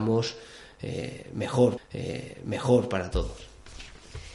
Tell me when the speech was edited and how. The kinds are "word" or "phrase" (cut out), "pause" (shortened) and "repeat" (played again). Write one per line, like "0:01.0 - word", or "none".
0:01.8 - repeat